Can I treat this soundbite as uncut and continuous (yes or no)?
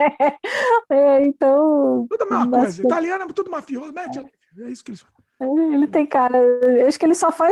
yes